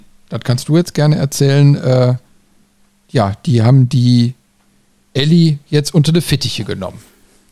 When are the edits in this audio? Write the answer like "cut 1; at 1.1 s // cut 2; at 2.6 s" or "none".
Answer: none